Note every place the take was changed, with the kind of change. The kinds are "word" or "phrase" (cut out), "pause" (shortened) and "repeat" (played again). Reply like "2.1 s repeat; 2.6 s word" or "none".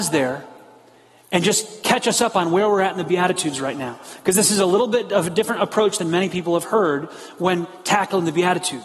none